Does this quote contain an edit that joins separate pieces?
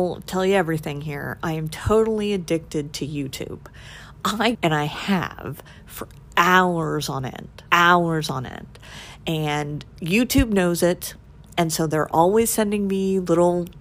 yes; 3 cuts; at 4.5 s, 7.7 s, 9.9 s

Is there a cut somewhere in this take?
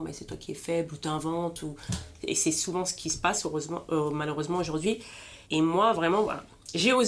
yes; 1 cut; at 5.4 s

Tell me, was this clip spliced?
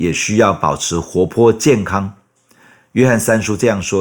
no; 0 cuts

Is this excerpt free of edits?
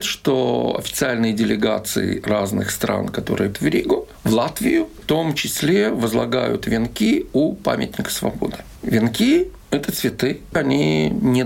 no; 2 cuts; at 3.5 s, 5.0 s

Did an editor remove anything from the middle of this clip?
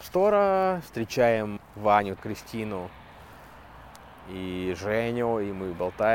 yes; 2 cuts; at 1.6 s, 2.2 s

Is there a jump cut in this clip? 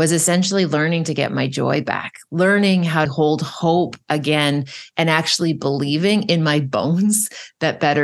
yes; 1 cut; at 3.1 s

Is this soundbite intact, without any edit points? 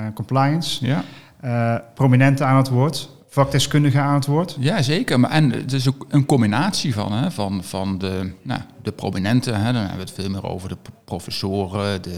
yes; 0 cuts

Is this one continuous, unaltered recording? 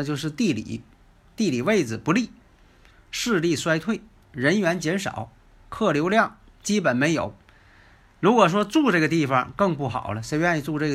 yes; 0 cuts

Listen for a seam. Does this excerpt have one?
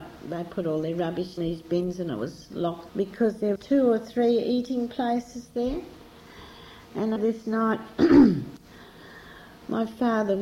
yes; 4 cuts; at 1.4 s, 2.9 s, 3.6 s, 7.2 s

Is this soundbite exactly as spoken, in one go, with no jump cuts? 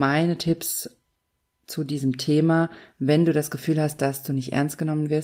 yes; 0 cuts

